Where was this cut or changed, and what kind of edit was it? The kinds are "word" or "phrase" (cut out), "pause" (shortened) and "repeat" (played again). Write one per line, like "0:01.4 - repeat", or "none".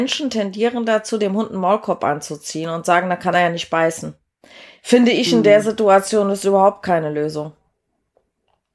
none